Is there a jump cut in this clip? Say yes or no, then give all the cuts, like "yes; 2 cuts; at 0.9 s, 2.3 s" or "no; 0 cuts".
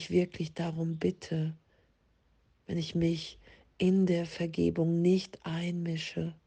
no; 0 cuts